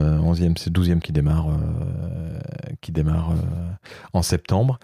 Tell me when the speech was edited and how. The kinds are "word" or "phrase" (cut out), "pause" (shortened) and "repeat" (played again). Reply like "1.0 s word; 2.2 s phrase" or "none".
1.0 s word